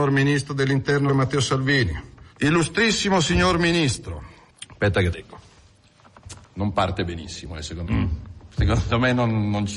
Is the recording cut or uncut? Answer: cut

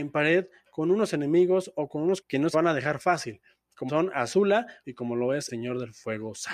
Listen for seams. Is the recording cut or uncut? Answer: cut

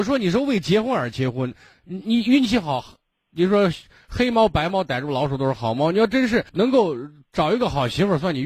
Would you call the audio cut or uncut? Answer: cut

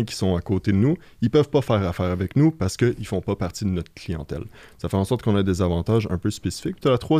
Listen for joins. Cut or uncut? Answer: uncut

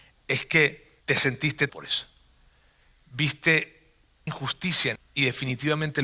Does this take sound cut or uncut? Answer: cut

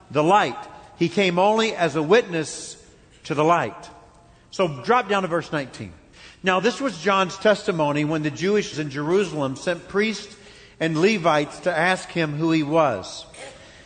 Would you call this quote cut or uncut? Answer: cut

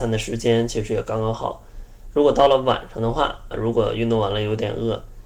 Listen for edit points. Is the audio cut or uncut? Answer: cut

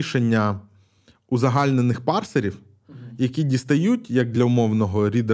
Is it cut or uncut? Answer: uncut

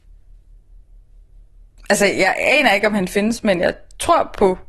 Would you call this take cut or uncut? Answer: uncut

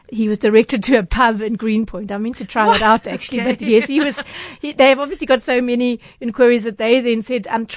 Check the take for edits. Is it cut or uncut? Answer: uncut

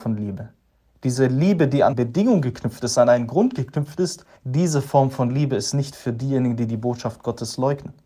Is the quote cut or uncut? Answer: cut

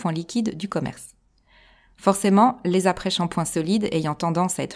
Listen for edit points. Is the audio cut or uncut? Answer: uncut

